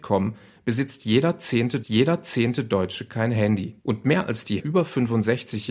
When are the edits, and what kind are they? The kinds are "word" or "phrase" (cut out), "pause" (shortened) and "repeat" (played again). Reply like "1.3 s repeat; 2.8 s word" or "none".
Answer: 1.8 s repeat; 3.8 s pause; 4.6 s phrase